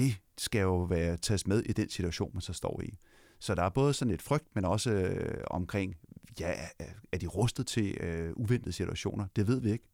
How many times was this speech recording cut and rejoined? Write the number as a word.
zero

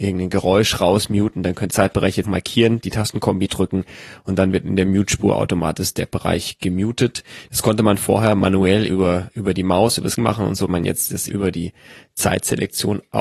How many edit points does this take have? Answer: six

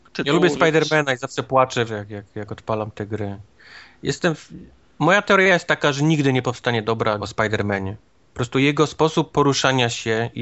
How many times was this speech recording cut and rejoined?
two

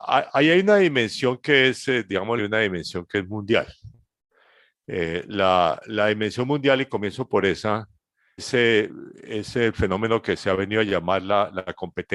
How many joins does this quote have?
two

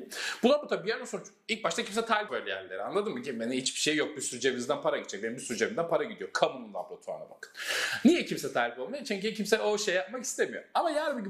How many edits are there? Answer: one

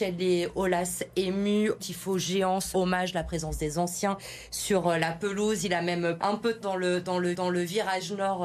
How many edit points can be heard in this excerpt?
five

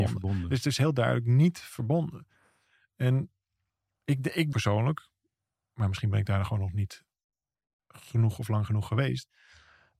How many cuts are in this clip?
one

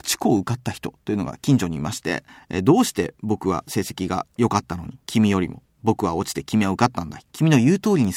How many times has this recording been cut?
two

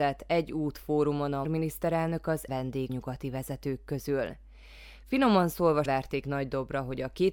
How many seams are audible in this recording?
four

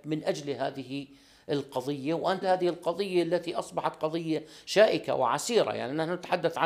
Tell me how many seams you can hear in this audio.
one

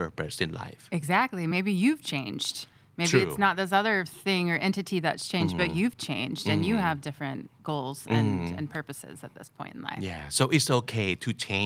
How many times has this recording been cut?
zero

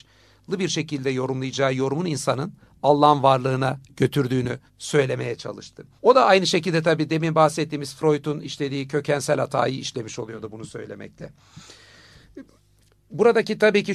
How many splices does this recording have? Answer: two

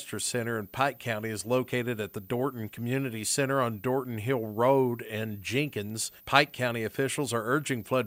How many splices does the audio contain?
one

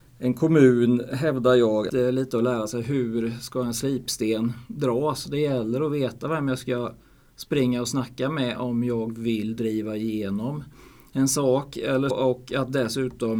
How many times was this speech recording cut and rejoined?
two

